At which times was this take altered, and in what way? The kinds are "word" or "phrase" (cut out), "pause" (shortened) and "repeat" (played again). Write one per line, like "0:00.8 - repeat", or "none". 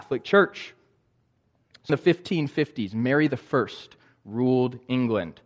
0:01.9 - phrase